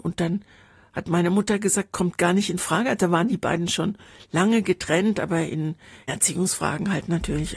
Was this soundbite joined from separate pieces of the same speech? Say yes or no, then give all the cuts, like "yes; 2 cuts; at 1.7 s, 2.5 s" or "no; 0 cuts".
no; 0 cuts